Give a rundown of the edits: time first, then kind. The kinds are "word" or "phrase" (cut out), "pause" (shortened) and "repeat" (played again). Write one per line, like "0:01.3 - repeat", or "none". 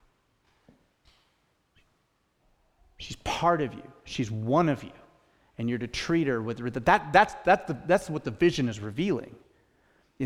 none